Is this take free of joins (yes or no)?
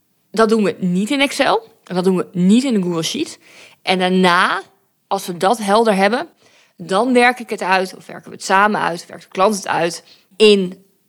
yes